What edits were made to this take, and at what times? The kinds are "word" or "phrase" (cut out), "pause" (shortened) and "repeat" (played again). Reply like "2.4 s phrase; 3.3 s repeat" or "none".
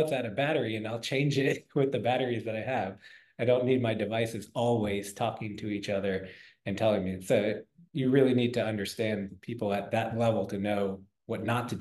none